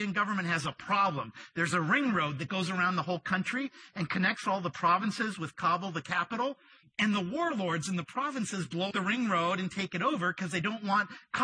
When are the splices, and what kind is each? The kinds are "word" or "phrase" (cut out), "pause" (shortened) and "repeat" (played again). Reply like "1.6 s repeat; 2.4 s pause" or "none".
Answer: 8.9 s word